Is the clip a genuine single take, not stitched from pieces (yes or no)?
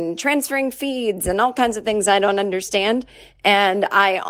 yes